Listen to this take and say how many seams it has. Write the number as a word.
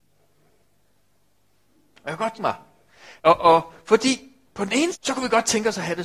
four